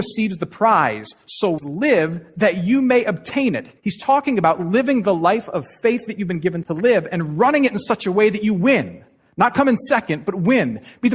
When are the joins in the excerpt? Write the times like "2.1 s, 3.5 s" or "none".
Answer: 1.6 s, 3.8 s, 6.6 s